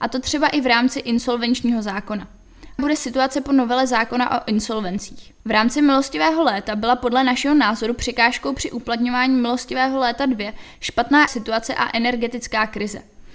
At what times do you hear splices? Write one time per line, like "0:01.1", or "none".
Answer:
0:02.8
0:05.4
0:11.3